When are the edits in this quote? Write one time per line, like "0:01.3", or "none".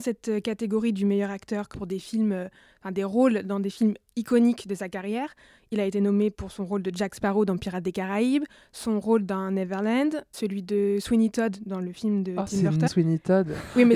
0:01.7
0:10.3
0:12.9